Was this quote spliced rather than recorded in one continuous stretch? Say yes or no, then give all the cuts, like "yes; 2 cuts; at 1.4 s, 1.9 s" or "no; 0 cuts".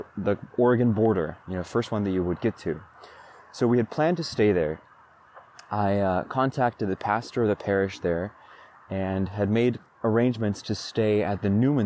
no; 0 cuts